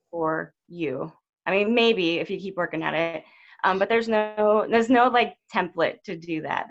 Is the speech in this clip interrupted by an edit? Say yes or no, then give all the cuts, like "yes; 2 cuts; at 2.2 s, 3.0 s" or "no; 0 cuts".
no; 0 cuts